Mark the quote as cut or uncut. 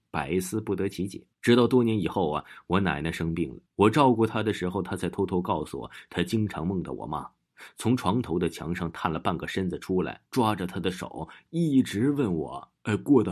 cut